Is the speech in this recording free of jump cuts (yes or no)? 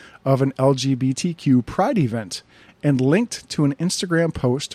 yes